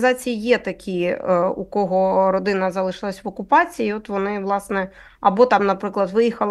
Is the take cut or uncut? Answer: uncut